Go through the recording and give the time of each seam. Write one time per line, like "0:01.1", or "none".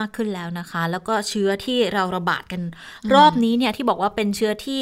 none